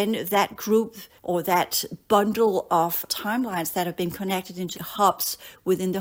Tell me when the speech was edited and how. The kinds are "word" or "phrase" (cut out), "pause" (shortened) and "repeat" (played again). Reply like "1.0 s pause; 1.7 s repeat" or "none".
1.2 s pause; 3.1 s word; 4.7 s word